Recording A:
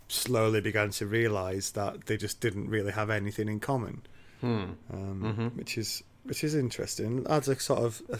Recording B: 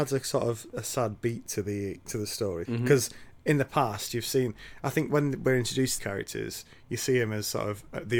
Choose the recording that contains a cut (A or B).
B